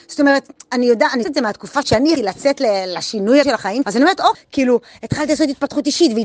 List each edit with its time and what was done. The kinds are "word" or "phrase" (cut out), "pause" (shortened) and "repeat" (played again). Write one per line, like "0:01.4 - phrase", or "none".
0:01.2 - word
0:01.8 - word
0:02.2 - word
0:03.4 - word
0:03.8 - word
0:04.3 - word